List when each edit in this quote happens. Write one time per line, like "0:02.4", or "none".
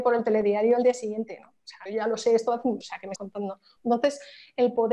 0:01.9
0:02.8
0:03.2